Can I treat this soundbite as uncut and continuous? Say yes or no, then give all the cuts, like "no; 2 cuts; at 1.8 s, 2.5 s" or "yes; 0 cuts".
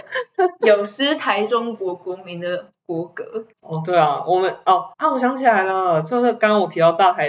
no; 3 cuts; at 2.8 s, 3.5 s, 4.9 s